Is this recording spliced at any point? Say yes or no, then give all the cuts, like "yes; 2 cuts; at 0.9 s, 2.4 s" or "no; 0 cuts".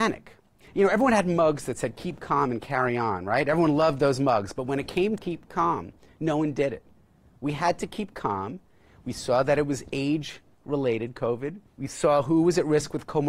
yes; 2 cuts; at 5.2 s, 11.7 s